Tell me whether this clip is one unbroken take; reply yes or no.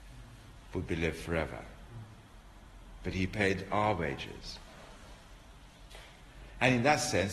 yes